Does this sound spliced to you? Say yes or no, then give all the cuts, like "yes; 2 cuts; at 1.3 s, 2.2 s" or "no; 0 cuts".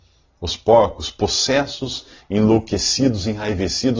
no; 0 cuts